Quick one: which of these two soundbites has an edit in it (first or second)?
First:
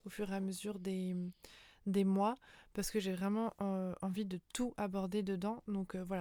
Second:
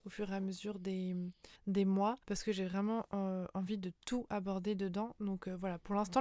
second